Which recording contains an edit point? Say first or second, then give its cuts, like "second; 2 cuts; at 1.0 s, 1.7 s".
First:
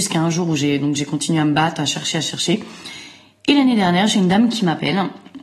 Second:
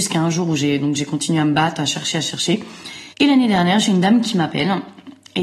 second; 1 cut; at 3.1 s